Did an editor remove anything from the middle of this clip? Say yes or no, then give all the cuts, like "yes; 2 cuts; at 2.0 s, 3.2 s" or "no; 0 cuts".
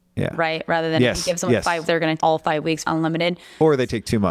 yes; 3 cuts; at 1.8 s, 2.2 s, 2.8 s